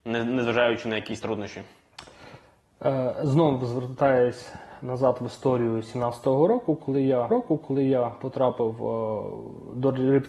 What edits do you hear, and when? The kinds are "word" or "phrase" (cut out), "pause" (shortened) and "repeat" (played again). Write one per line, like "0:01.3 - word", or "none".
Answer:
0:01.2 - word
0:07.3 - repeat